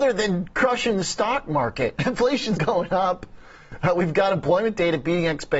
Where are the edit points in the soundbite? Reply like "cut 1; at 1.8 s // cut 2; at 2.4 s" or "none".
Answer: cut 1; at 2.6 s